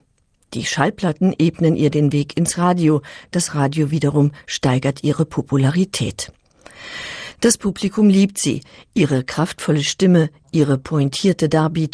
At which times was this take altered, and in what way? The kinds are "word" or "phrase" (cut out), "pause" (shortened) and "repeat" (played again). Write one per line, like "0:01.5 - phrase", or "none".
none